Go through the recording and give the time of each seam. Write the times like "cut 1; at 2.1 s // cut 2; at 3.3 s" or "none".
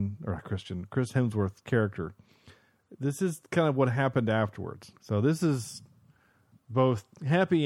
cut 1; at 5.0 s